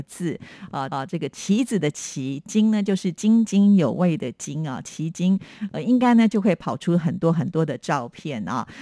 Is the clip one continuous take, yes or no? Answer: no